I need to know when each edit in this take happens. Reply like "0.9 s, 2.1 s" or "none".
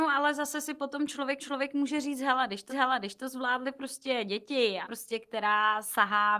1.4 s, 2.7 s, 4.8 s

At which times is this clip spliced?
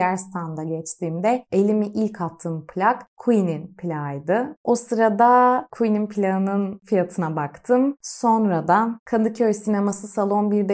none

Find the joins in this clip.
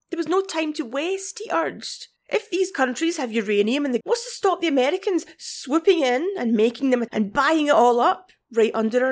2.2 s, 4.0 s, 7.1 s

